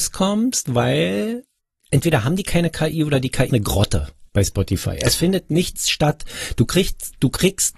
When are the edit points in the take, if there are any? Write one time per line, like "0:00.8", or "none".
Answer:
0:01.6
0:03.5
0:04.3